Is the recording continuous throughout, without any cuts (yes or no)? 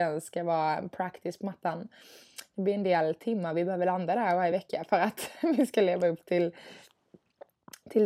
yes